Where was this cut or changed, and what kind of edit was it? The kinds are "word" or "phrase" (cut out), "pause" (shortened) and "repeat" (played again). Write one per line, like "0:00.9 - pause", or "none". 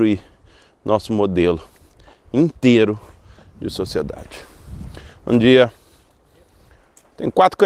none